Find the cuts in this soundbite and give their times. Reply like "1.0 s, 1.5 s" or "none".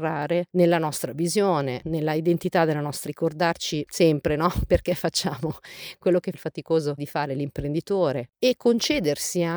3.1 s, 6.3 s, 7.0 s